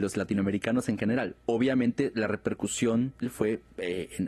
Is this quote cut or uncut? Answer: cut